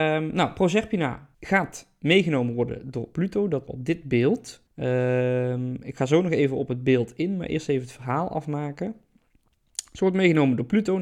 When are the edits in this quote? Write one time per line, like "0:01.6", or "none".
0:01.3
0:03.7
0:04.7